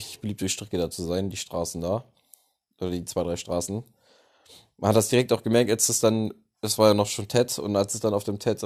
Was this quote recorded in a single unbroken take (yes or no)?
yes